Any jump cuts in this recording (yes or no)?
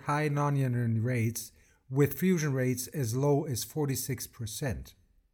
no